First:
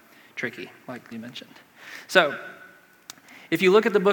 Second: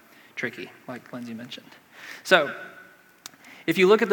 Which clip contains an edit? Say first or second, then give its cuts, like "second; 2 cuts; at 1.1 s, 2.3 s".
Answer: first; 1 cut; at 1.1 s